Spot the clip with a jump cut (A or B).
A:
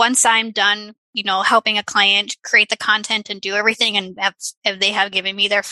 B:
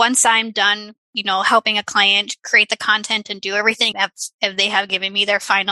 B